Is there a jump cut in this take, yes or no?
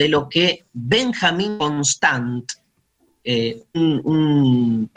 no